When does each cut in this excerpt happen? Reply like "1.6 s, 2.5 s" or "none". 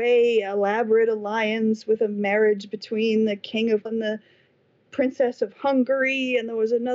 3.9 s

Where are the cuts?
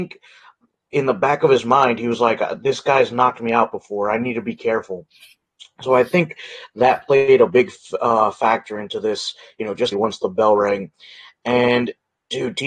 9.9 s

